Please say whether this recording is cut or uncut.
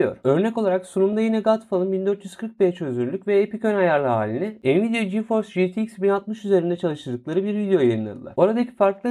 uncut